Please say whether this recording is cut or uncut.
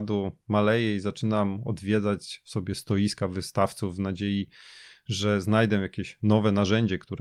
uncut